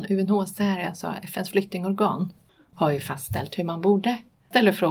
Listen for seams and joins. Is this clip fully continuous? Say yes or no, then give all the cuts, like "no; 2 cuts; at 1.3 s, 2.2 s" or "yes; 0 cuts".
yes; 0 cuts